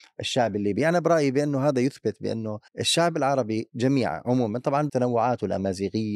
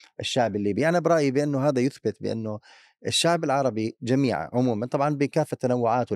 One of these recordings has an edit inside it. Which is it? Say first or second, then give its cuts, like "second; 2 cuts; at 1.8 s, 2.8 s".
first; 2 cuts; at 2.7 s, 4.9 s